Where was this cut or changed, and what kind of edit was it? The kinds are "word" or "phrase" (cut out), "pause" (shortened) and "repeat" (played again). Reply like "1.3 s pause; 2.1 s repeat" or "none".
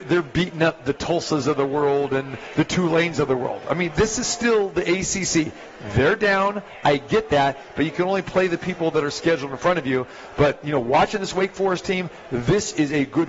none